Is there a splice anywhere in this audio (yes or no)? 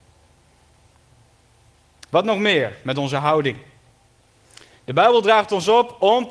no